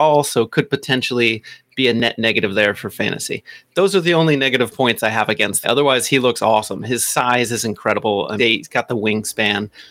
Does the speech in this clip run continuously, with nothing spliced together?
no; 2 cuts; at 5.6 s, 8.4 s

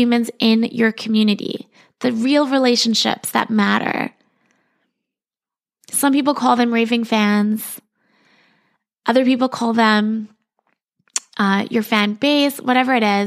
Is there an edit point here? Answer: no; 0 cuts

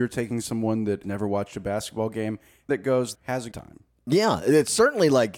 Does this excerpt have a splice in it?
yes; 4 cuts; at 1.0 s, 2.7 s, 3.1 s, 3.5 s

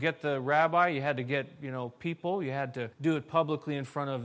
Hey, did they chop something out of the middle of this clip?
yes; 1 cut; at 2.9 s

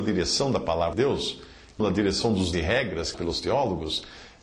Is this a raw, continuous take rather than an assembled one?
no; 4 cuts; at 0.9 s, 1.8 s, 2.5 s, 3.1 s

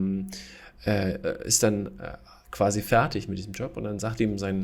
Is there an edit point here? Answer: no; 0 cuts

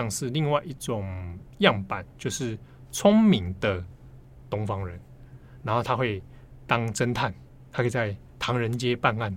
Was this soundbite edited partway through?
no; 0 cuts

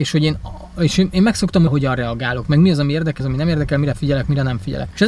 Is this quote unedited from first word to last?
no; 2 cuts; at 1.7 s, 3.2 s

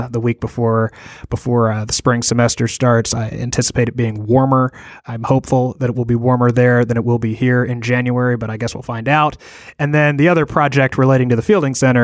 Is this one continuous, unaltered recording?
yes; 0 cuts

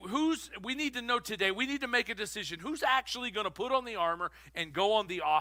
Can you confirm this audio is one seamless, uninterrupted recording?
yes; 0 cuts

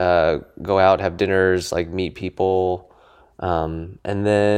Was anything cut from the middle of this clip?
no; 0 cuts

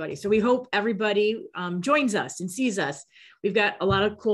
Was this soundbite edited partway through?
no; 0 cuts

